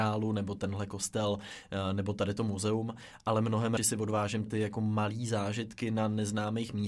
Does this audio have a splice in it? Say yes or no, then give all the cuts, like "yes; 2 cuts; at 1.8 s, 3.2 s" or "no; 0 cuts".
yes; 2 cuts; at 3.8 s, 4.5 s